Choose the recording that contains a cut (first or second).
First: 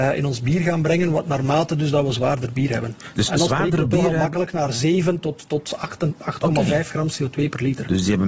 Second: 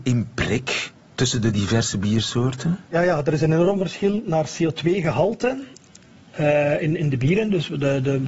second